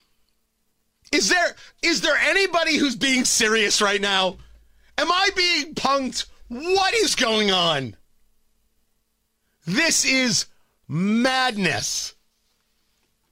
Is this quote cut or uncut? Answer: uncut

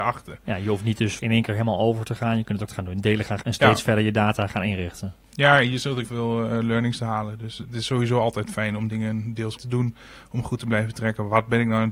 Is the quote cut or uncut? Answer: cut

